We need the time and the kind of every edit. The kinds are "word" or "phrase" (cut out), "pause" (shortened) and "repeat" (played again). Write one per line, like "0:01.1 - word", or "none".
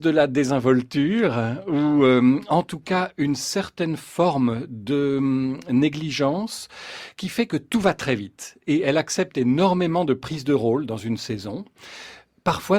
none